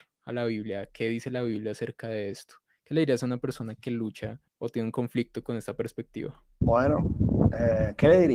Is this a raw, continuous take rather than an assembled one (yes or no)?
no